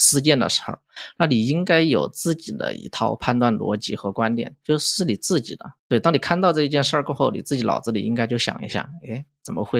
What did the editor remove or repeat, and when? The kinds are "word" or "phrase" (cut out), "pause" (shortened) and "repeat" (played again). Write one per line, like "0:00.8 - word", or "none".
0:05.8 - pause